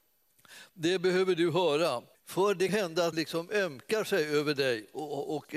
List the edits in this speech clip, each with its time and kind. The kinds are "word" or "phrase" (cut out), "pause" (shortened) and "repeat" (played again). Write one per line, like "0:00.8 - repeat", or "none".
0:02.1 - pause
0:02.7 - phrase
0:03.1 - word